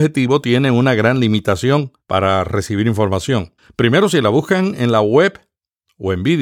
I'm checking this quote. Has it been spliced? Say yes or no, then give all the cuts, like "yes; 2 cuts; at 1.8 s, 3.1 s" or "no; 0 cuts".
yes; 2 cuts; at 2.0 s, 3.6 s